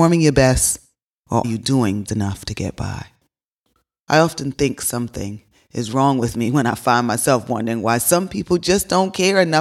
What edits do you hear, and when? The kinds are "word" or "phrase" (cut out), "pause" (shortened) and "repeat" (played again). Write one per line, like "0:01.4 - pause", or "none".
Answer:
0:01.4 - word
0:02.0 - word
0:03.6 - pause